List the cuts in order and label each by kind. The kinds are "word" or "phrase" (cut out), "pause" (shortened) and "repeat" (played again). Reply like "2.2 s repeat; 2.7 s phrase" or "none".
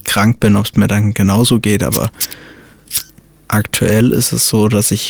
none